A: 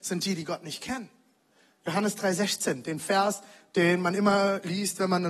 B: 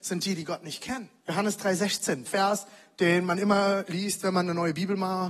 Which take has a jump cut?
B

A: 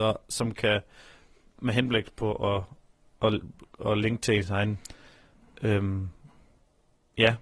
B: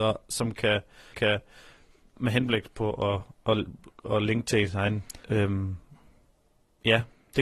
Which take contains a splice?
B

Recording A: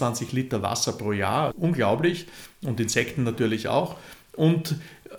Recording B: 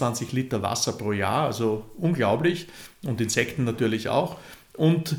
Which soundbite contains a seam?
A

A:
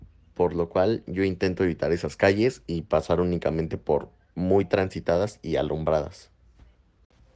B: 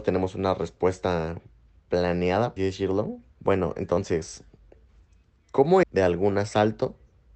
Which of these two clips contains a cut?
B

